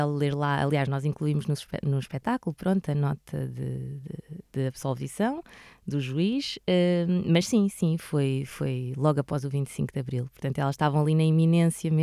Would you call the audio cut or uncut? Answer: uncut